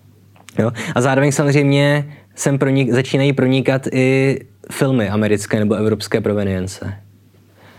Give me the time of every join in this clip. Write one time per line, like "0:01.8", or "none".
none